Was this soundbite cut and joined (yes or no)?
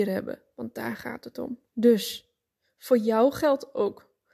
yes